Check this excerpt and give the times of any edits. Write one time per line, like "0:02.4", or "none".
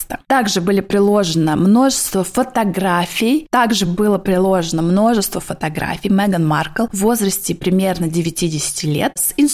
none